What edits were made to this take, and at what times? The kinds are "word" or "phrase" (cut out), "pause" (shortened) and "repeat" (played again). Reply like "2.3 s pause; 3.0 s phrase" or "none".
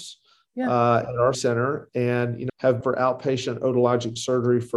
1.3 s word; 2.5 s word; 2.8 s phrase